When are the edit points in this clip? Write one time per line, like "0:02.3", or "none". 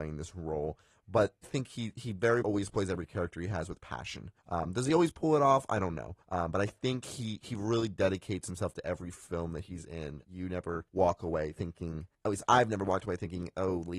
0:01.4
0:02.4
0:04.4
0:06.2
0:07.4
0:10.2
0:10.9
0:12.1